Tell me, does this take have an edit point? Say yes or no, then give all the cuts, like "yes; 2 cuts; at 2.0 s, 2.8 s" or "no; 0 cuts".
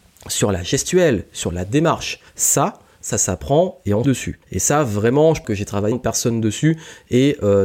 yes; 5 cuts; at 2.3 s, 4.0 s, 4.4 s, 5.4 s, 5.9 s